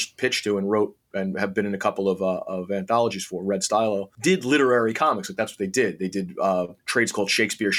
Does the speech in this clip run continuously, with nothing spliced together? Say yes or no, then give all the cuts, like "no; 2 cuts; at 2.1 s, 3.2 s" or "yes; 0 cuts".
no; 1 cut; at 6.8 s